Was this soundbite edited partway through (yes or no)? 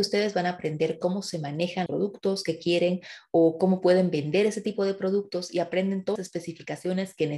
yes